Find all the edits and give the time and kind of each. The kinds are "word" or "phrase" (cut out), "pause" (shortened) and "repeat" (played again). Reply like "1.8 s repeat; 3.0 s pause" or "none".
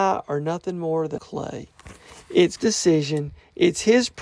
1.2 s phrase; 2.6 s word

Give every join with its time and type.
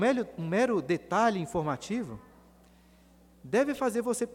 none

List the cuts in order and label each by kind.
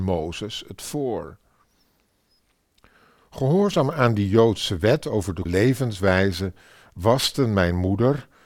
5.4 s word

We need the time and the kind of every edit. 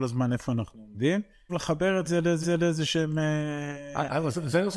1.5 s word; 2.4 s repeat

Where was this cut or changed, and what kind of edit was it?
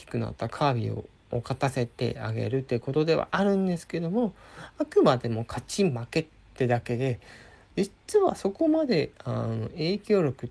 none

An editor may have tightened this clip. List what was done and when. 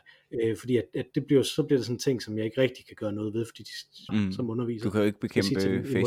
4.1 s phrase

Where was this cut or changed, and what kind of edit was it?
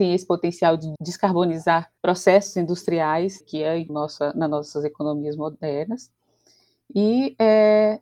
1.0 s word; 2.0 s pause; 3.4 s word; 3.9 s phrase

